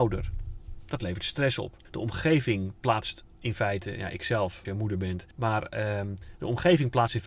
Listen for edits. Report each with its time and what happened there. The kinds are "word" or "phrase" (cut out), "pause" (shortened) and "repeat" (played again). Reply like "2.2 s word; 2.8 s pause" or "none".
1.8 s pause; 4.6 s phrase; 5.3 s pause